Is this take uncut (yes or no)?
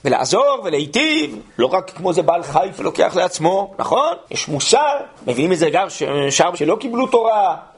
no